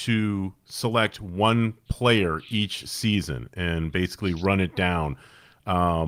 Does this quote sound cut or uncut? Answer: uncut